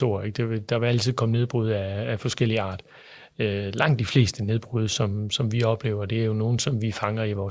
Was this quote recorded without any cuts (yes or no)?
yes